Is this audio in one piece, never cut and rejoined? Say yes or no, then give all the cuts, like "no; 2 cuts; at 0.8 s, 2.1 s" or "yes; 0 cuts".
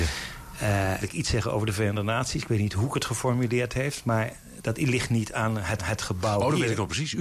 no; 2 cuts; at 1.0 s, 5.8 s